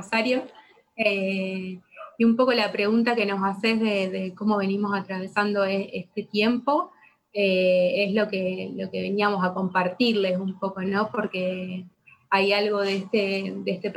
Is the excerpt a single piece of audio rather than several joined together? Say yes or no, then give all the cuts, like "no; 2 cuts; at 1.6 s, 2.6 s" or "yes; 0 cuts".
yes; 0 cuts